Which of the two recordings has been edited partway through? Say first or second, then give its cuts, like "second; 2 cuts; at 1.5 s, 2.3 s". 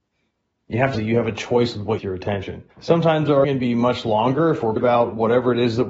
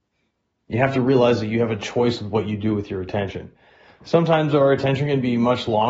first; 5 cuts; at 0.9 s, 2.0 s, 2.7 s, 3.4 s, 4.8 s